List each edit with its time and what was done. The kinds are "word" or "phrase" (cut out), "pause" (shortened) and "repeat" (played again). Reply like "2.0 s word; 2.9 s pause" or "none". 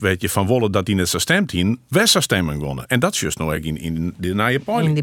none

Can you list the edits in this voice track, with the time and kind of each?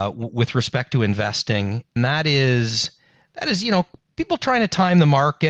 2.0 s word; 4.0 s word

